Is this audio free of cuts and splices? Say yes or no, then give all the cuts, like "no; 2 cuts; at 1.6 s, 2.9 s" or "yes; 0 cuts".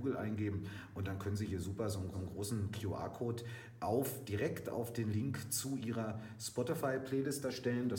no; 1 cut; at 2.1 s